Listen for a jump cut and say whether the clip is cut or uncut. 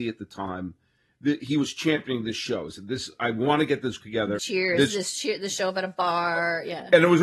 cut